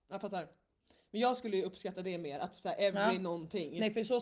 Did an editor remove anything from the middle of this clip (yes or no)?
no